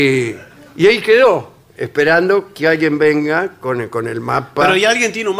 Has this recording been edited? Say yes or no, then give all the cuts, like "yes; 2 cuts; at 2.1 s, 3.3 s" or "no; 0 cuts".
no; 0 cuts